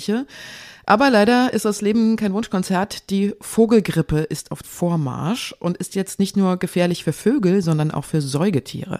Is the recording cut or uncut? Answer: cut